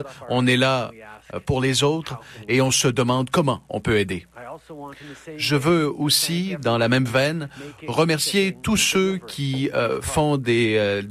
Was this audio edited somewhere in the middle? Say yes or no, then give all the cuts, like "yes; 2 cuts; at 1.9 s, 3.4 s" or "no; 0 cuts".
no; 0 cuts